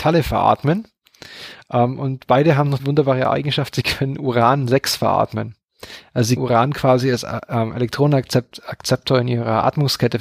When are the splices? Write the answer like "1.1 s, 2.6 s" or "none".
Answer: 2.8 s, 6.4 s